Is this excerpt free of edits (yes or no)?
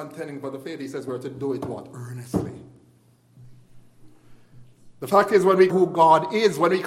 no